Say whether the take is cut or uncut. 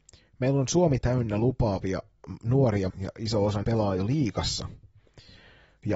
cut